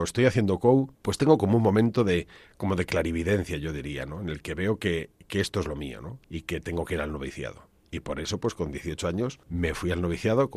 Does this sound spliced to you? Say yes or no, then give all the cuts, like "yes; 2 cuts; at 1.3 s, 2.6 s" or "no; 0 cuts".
yes; 2 cuts; at 0.9 s, 6.2 s